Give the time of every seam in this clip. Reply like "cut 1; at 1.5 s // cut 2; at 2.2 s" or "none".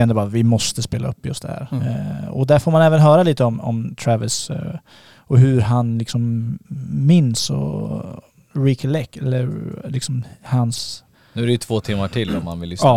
none

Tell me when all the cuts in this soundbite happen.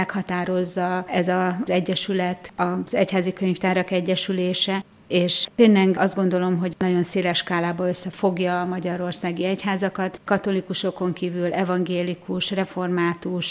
none

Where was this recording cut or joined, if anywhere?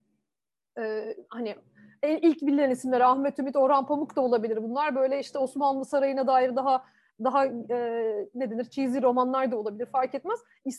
none

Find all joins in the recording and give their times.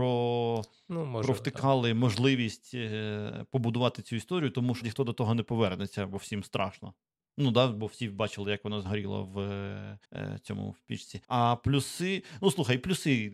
cut 1; at 4.8 s // cut 2; at 10.0 s // cut 3; at 11.2 s

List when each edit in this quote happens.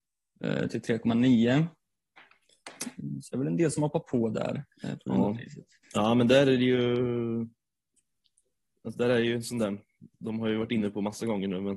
cut 1; at 5.8 s // cut 2; at 10.1 s

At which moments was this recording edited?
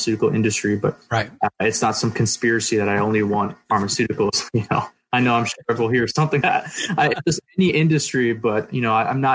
cut 1; at 6.4 s

